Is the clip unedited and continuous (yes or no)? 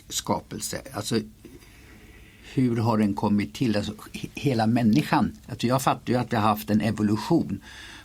yes